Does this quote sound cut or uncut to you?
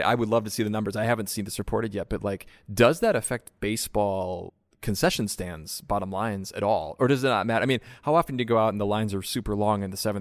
uncut